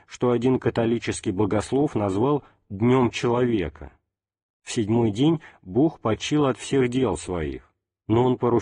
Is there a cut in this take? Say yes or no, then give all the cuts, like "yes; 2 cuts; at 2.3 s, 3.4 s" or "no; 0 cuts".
no; 0 cuts